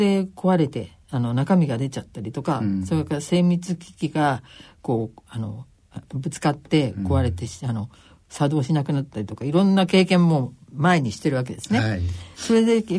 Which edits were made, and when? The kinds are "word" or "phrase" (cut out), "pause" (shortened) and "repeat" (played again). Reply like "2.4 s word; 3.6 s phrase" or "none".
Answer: 1.0 s pause

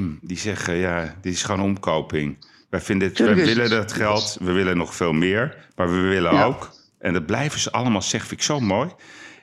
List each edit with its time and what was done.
none

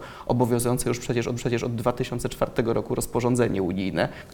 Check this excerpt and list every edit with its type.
1.4 s repeat

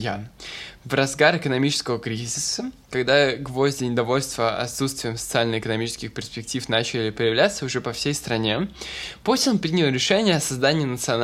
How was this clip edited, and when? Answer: none

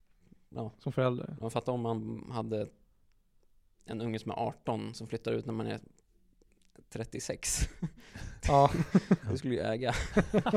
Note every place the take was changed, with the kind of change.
none

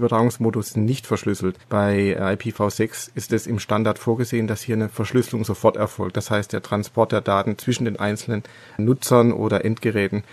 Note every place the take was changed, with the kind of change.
1.6 s pause; 8.6 s pause

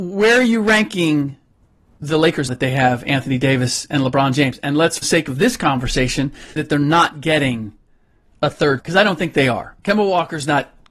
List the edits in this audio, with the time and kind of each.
2.5 s word; 5.0 s word; 6.6 s word; 8.8 s word

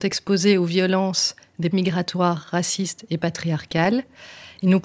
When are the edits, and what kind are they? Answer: 1.7 s word

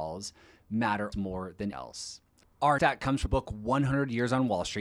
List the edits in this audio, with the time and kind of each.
1.1 s word; 1.7 s word; 2.8 s word; 3.3 s word

